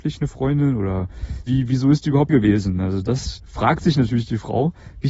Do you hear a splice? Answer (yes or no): yes